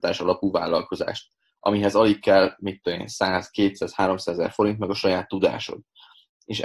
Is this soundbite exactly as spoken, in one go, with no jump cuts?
yes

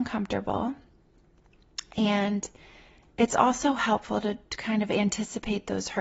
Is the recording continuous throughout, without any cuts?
yes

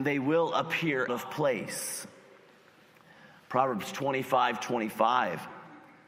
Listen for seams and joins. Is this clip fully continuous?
no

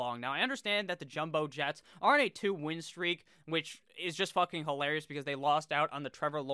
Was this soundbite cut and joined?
no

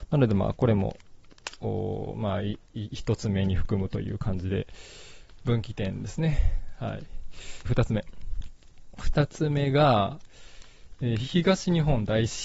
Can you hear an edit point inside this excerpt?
yes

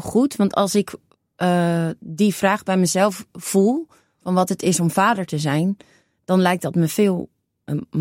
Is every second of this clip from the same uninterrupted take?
yes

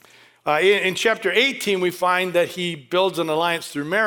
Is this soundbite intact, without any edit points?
yes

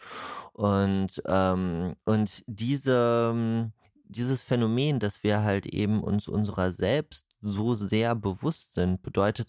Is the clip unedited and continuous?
no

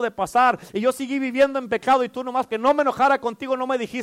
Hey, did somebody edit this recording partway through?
yes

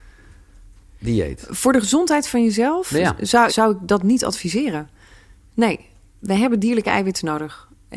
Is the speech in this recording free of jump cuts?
no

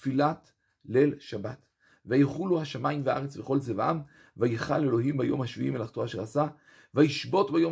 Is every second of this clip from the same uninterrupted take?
yes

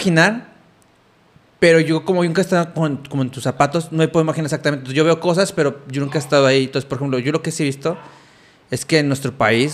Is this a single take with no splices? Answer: yes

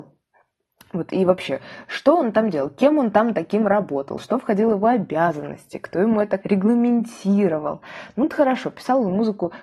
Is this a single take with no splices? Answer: no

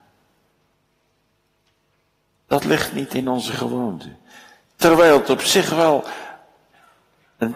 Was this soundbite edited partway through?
no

